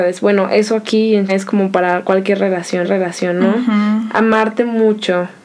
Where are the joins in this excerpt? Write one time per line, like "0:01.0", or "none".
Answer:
0:01.3
0:02.8